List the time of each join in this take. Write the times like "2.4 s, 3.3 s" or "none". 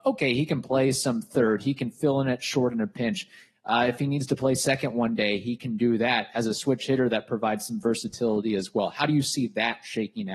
none